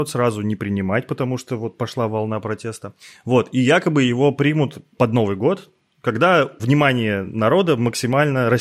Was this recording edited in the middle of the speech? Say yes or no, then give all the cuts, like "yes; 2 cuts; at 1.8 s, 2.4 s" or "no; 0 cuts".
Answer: no; 0 cuts